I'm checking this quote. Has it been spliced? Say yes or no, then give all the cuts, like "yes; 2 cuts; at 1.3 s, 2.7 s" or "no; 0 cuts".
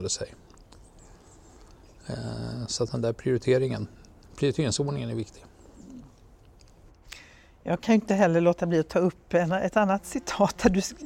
no; 0 cuts